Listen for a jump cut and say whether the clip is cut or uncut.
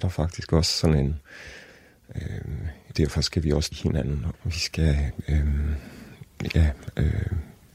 cut